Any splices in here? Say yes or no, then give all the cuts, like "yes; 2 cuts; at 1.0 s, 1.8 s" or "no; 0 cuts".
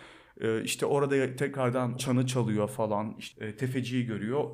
yes; 1 cut; at 2.0 s